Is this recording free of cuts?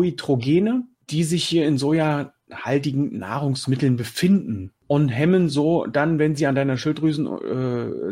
yes; 0 cuts

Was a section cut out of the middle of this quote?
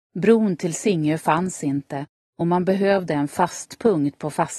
no; 0 cuts

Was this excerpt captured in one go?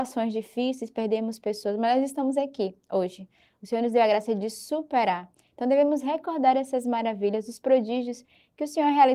yes; 0 cuts

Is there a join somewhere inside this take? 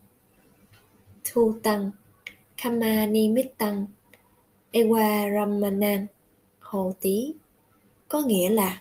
no; 0 cuts

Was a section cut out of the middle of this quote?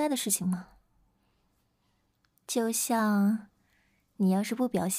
no; 0 cuts

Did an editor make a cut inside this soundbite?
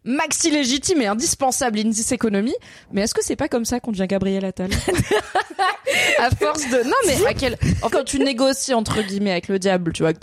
yes; 1 cut; at 7.9 s

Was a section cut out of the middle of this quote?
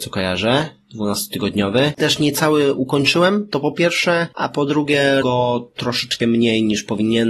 yes; 1 cut; at 5.2 s

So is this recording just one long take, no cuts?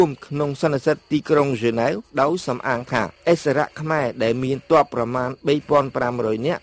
no; 1 cut; at 2.1 s

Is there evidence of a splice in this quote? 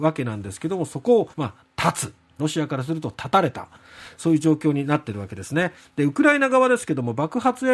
yes; 2 cuts; at 1.3 s, 2.4 s

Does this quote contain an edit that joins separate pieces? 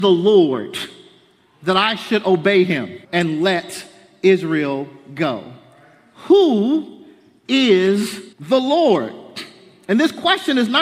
yes; 2 cuts; at 3.0 s, 8.3 s

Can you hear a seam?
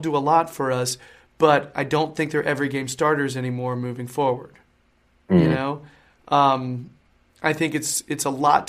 no; 0 cuts

